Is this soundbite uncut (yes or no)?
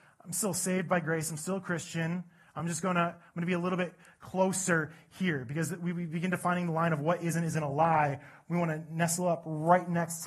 yes